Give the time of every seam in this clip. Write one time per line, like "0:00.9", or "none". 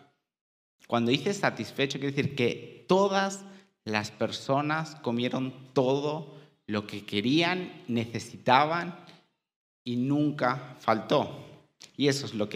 none